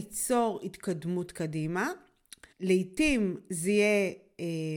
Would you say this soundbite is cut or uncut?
cut